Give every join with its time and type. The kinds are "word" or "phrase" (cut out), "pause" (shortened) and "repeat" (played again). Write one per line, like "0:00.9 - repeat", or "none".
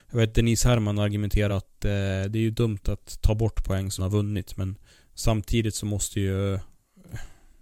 0:01.5 - phrase
0:04.0 - phrase
0:04.9 - pause

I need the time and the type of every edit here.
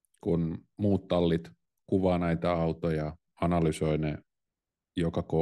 none

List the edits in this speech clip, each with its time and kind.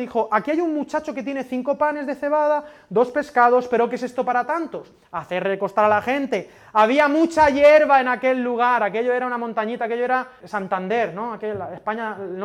0:10.4 - word

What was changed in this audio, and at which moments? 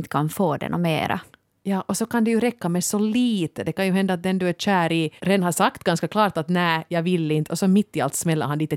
0:05.2 - pause

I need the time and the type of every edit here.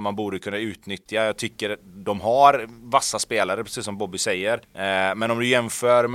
0:04.6 - pause

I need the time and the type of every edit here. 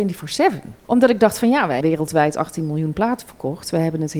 0:01.8 - word

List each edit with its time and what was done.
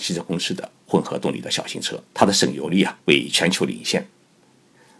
0:02.1 - pause
0:03.0 - pause

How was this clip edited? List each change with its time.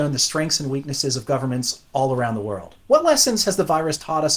0:02.8 - pause

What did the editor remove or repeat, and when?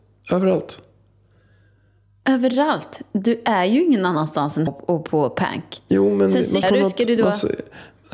0:04.7 - word
0:06.6 - word

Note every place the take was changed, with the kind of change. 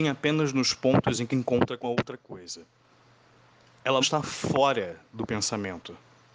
0:01.3 - word
0:01.8 - word
0:04.0 - word

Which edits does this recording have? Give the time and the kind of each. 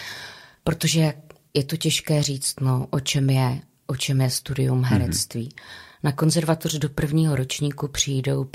none

